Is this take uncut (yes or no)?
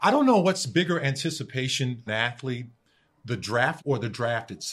no